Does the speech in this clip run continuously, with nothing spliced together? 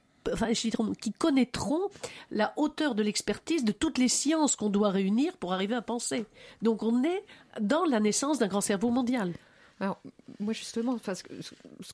yes; 0 cuts

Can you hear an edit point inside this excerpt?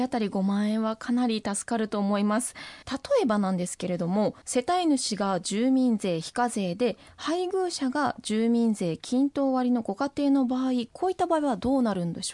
yes; 2 cuts; at 2.8 s, 4.4 s

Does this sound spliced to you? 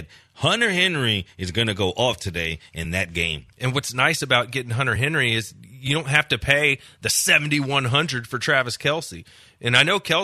no; 0 cuts

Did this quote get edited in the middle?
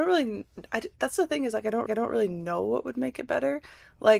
yes; 1 cut; at 1.9 s

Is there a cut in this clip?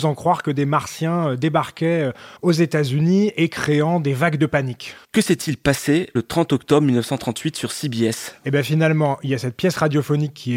yes; 1 cut; at 2.4 s

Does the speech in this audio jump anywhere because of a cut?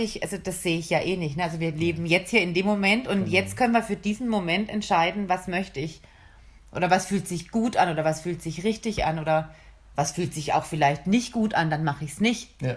no; 0 cuts

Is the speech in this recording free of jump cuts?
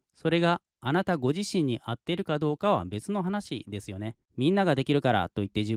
no; 1 cut; at 4.3 s

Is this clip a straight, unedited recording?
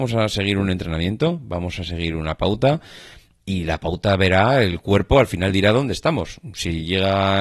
yes; 0 cuts

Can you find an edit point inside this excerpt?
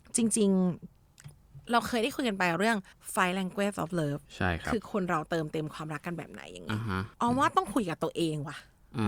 yes; 4 cuts; at 0.9 s, 2.9 s, 4.2 s, 7.1 s

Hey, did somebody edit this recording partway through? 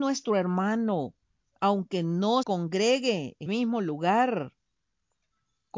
yes; 2 cuts; at 2.4 s, 3.5 s

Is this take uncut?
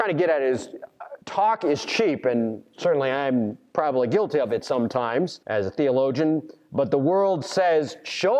no; 1 cut; at 5.4 s

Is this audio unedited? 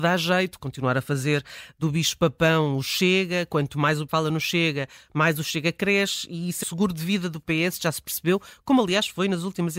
no; 2 cuts; at 4.1 s, 6.6 s

